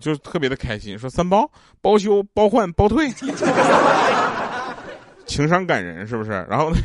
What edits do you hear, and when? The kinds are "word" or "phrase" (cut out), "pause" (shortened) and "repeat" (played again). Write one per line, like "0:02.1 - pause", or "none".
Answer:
none